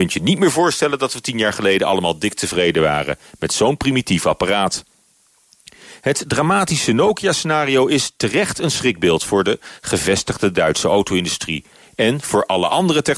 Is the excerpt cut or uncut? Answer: uncut